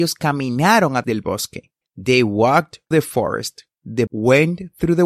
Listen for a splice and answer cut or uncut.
cut